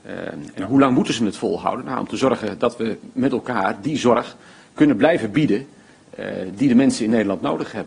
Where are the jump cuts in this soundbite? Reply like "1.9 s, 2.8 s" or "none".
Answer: none

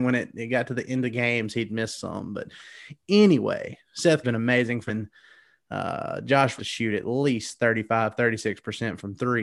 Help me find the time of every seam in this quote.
4.2 s, 4.9 s, 6.6 s

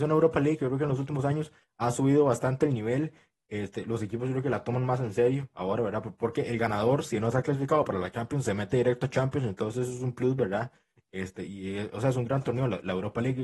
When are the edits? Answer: none

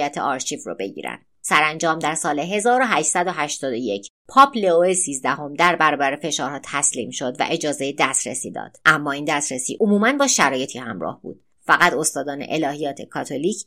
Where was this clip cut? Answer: 1.3 s, 4.2 s, 8.8 s, 11.5 s

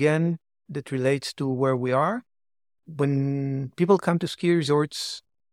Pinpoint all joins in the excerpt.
none

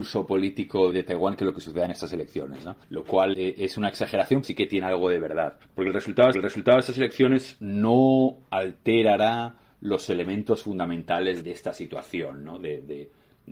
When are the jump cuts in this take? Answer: 0.9 s, 2.8 s, 3.3 s, 4.4 s, 5.6 s, 6.3 s, 11.4 s

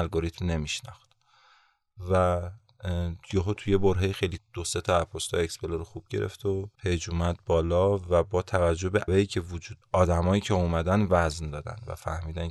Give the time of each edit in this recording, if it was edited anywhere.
3.2 s, 4.4 s, 6.7 s, 9.1 s, 9.8 s

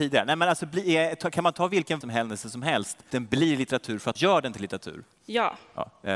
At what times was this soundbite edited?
2.0 s, 3.1 s, 4.2 s

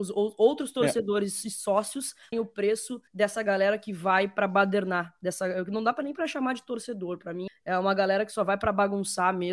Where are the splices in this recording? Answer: 2.3 s, 3.1 s, 7.5 s

